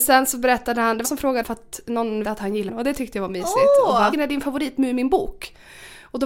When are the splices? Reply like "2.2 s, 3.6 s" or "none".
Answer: 1.0 s, 1.4 s, 2.2 s, 2.7 s, 4.1 s